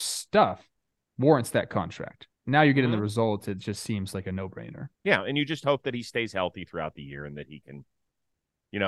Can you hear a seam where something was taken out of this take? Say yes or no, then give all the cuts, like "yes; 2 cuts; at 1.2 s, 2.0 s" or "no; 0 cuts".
yes; 3 cuts; at 0.9 s, 2.3 s, 4.9 s